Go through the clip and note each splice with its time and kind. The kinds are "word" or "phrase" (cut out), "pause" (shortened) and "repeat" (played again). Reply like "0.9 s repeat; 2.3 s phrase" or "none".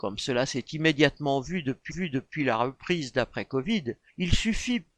1.9 s repeat; 4.1 s pause